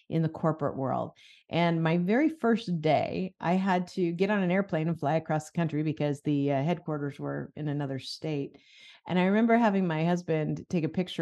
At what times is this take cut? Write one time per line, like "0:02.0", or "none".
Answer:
none